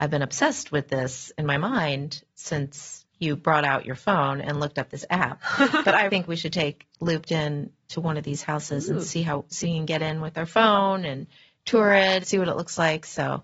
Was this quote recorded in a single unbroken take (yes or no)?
no